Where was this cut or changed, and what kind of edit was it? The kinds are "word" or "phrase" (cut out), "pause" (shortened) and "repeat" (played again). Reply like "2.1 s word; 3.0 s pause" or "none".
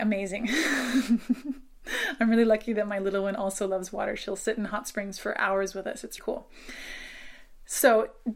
6.2 s word